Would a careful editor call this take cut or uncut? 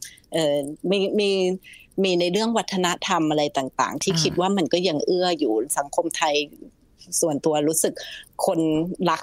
uncut